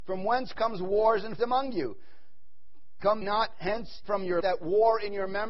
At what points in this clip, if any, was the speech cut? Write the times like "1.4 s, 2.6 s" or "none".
1.4 s, 3.2 s, 4.0 s, 4.4 s